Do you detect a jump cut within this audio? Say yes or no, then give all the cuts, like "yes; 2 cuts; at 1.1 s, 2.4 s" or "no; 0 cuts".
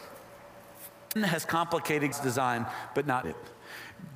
yes; 3 cuts; at 1.2 s, 2.1 s, 3.2 s